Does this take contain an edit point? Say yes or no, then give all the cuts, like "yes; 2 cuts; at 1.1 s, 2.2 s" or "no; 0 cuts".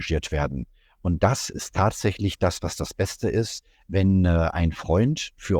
no; 0 cuts